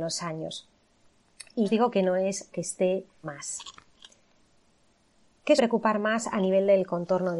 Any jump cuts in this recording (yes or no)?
yes